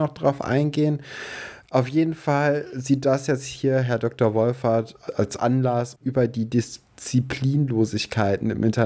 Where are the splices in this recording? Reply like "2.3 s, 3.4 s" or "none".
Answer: 5.1 s, 6.0 s